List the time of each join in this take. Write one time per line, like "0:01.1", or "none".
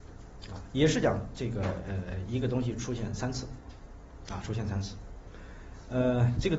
none